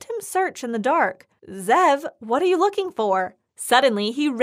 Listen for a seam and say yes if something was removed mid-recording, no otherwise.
no